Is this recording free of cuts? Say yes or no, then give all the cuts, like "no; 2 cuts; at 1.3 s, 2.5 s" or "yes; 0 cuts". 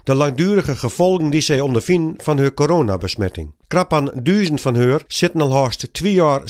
no; 2 cuts; at 3.6 s, 5.1 s